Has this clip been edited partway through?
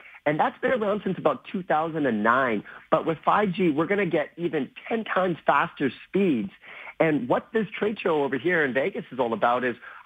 no; 0 cuts

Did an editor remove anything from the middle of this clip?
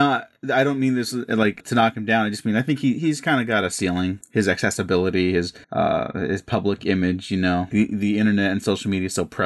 yes; 4 cuts; at 1.6 s, 4.2 s, 5.6 s, 7.7 s

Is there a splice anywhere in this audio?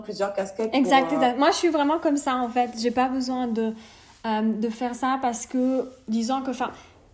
no; 0 cuts

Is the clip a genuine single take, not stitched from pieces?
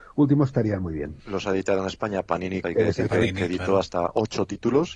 no; 2 cuts; at 1.2 s, 2.6 s

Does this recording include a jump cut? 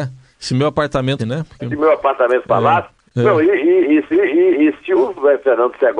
yes; 3 cuts; at 1.2 s, 1.6 s, 4.1 s

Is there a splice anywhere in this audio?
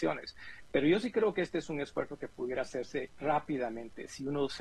yes; 1 cut; at 3.1 s

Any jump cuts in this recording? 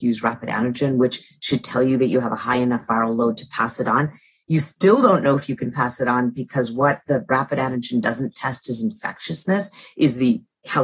no; 0 cuts

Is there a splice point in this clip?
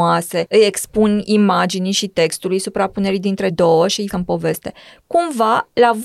yes; 2 cuts; at 3.5 s, 4.1 s

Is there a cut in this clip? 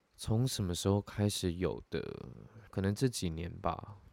yes; 1 cut; at 2.7 s

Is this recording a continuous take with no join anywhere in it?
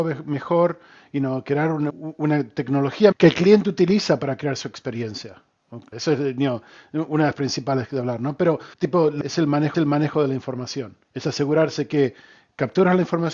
no; 8 cuts; at 1.9 s, 3.1 s, 5.9 s, 7.3 s, 8.7 s, 9.2 s, 9.7 s, 11.0 s

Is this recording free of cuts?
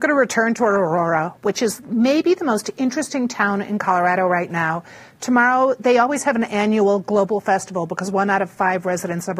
yes; 0 cuts

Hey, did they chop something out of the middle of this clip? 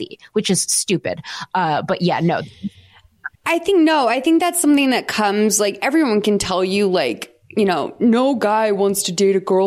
yes; 1 cut; at 3.3 s

